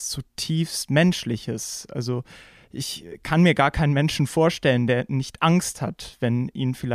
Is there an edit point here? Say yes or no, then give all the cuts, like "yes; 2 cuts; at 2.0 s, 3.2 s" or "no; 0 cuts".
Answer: no; 0 cuts